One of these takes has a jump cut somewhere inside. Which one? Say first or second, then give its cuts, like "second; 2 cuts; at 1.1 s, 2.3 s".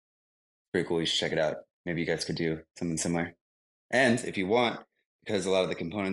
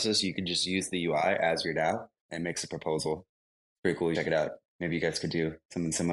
second; 3 cuts; at 2.2 s, 3.6 s, 4.1 s